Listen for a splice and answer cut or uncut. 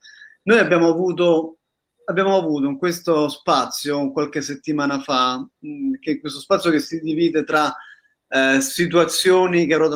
uncut